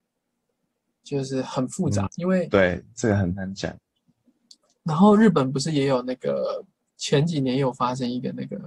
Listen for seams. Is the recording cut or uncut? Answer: cut